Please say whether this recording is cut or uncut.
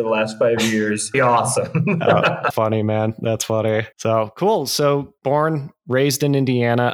cut